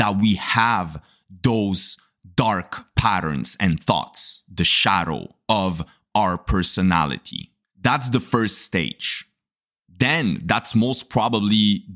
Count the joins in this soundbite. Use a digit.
0